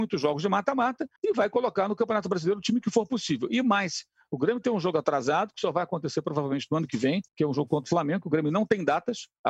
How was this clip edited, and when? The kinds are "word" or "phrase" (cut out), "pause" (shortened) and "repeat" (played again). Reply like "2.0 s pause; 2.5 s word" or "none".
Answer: 1.2 s pause; 7.3 s pause